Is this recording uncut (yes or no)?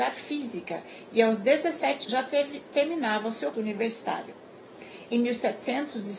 no